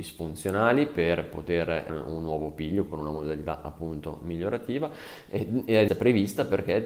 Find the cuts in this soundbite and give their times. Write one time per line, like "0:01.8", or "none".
0:01.9
0:02.9
0:05.9